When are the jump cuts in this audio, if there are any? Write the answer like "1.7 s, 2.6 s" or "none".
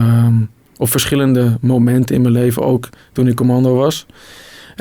none